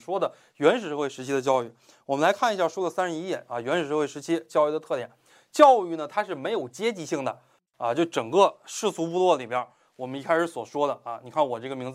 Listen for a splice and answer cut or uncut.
uncut